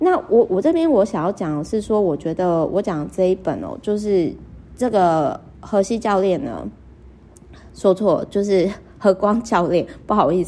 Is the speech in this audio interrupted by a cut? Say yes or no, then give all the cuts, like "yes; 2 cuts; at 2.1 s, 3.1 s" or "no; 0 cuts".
no; 0 cuts